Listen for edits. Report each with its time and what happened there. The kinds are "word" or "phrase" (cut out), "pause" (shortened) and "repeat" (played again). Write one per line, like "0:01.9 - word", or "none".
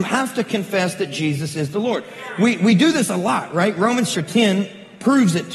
0:04.1 - word